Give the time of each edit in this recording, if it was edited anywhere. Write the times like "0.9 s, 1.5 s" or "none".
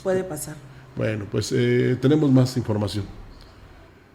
none